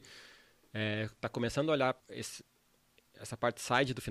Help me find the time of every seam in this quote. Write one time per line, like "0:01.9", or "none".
0:02.0